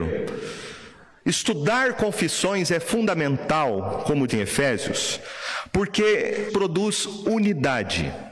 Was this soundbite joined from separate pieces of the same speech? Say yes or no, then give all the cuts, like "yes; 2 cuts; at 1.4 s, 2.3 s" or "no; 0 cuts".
yes; 2 cuts; at 4.3 s, 6.5 s